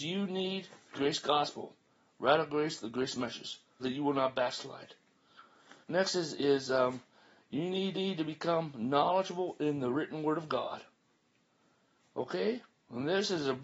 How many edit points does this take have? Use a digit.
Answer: 6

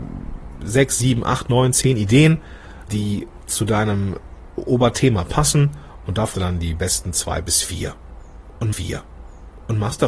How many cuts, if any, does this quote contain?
3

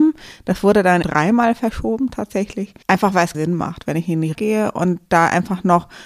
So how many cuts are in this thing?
4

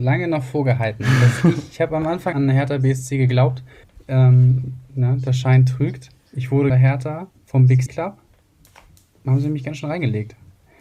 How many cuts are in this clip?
5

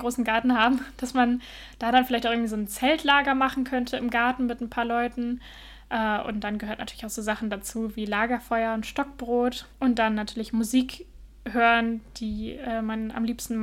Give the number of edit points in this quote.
1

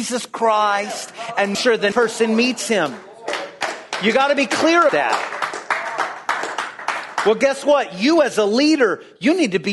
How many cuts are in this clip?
3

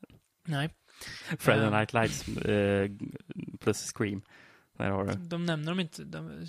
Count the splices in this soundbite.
0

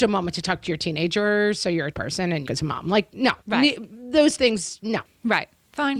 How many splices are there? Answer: 4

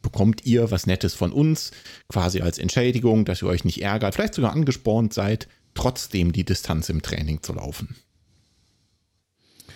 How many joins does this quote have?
1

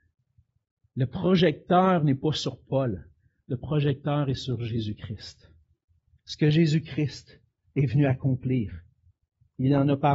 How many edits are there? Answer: 0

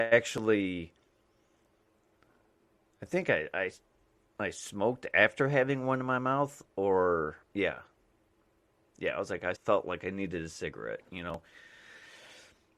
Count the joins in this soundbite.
3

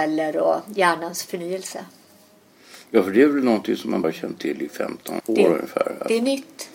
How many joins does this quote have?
2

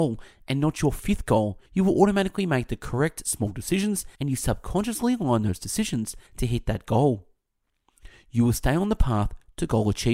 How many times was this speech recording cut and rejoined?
3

